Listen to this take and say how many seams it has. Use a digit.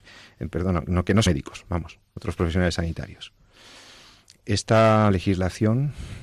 3